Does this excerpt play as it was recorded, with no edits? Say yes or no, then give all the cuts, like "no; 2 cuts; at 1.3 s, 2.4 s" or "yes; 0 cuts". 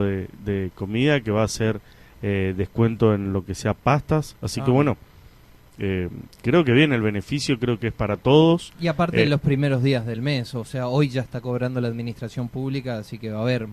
yes; 0 cuts